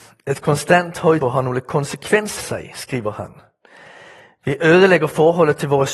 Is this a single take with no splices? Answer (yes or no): no